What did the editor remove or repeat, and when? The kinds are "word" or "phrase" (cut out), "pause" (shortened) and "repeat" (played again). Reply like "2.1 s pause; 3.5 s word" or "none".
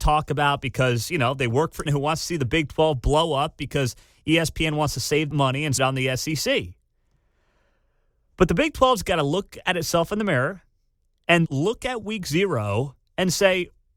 1.9 s word; 5.3 s word; 5.8 s word; 11.5 s word